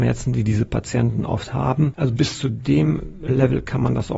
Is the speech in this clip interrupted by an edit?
no; 0 cuts

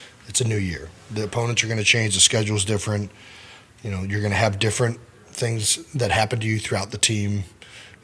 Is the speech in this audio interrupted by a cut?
no; 0 cuts

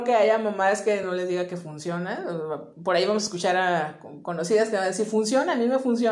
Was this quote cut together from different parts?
no; 0 cuts

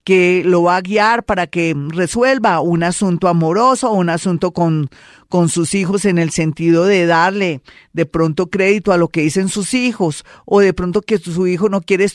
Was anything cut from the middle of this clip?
no; 0 cuts

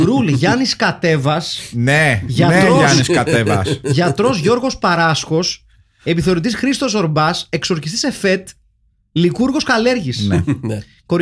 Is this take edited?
no; 0 cuts

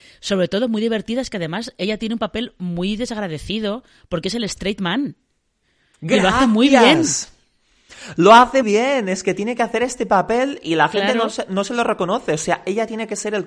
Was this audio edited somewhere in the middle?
yes; 1 cut; at 8.6 s

